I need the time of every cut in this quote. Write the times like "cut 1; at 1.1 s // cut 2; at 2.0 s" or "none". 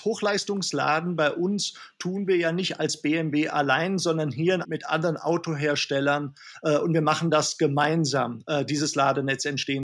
cut 1; at 4.6 s